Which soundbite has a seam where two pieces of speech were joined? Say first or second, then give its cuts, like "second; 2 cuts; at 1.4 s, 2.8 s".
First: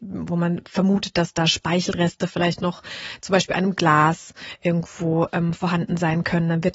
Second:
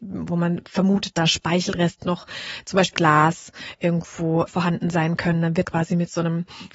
second; 5 cuts; at 1.1 s, 2.0 s, 2.9 s, 4.5 s, 5.6 s